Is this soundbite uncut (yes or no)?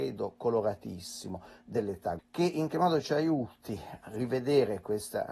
no